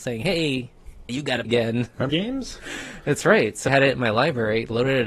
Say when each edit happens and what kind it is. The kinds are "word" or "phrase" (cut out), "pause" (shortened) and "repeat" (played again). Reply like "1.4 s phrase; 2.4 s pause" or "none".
1.1 s word; 1.4 s word; 2.1 s word; 3.7 s word